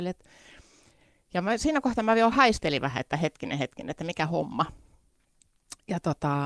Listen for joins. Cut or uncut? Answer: uncut